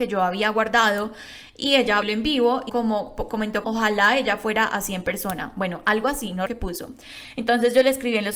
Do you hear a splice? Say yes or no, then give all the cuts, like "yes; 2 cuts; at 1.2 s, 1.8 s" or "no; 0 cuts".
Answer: yes; 4 cuts; at 2.0 s, 2.7 s, 3.6 s, 6.5 s